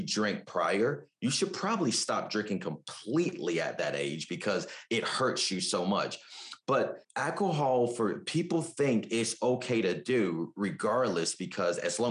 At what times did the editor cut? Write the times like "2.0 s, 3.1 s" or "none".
7.0 s